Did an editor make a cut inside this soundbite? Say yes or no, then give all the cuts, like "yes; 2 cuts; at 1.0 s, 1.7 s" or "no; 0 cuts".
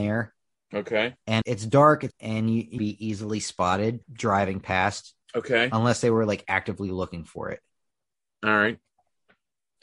yes; 5 cuts; at 1.4 s, 2.1 s, 2.8 s, 4.0 s, 5.2 s